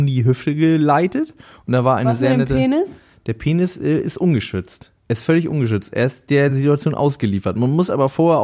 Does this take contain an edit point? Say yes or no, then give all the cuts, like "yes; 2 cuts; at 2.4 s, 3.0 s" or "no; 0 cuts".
no; 0 cuts